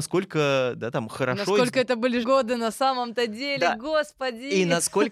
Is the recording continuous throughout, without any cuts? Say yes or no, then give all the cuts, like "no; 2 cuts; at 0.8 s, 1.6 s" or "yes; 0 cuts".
no; 1 cut; at 2.2 s